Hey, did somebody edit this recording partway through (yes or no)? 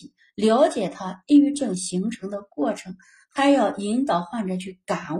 no